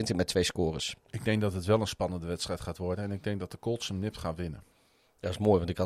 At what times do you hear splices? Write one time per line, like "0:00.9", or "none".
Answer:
none